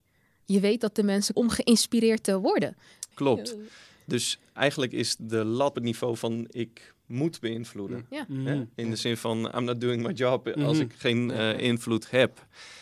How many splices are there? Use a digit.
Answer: 4